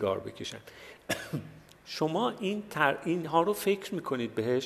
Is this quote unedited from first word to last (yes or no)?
yes